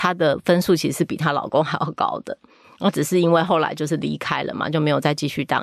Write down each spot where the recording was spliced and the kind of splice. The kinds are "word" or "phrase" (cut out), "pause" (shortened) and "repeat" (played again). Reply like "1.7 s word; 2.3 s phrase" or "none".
none